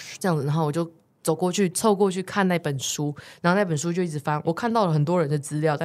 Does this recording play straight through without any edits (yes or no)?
yes